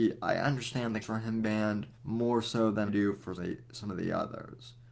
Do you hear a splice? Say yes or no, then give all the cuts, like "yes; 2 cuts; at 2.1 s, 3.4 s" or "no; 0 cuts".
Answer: yes; 5 cuts; at 1.0 s, 1.4 s, 1.9 s, 2.9 s, 3.4 s